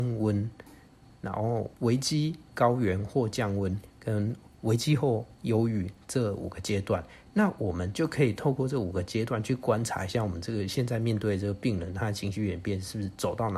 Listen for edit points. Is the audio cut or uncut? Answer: cut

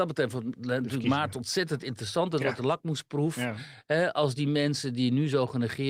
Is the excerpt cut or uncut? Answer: uncut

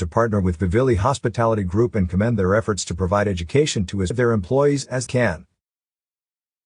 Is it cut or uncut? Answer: cut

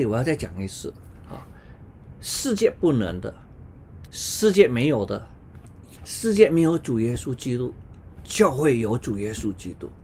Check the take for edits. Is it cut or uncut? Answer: cut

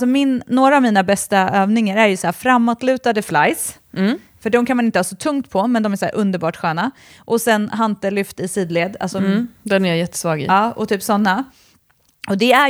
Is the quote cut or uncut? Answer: uncut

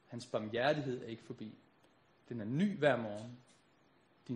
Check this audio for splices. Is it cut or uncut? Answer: uncut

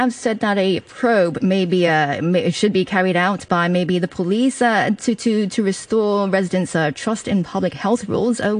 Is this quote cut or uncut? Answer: uncut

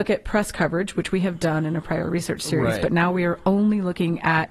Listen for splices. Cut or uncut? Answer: uncut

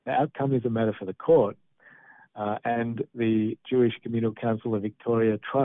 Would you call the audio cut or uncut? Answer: uncut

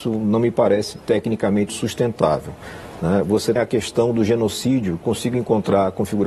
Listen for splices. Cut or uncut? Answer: cut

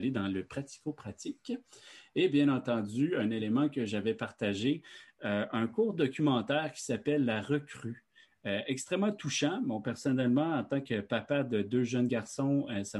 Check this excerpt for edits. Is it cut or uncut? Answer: uncut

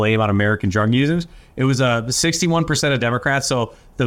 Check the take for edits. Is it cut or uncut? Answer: uncut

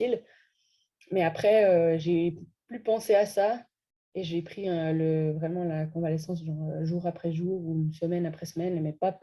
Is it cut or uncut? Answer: uncut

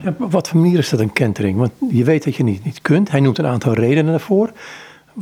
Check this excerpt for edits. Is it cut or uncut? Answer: uncut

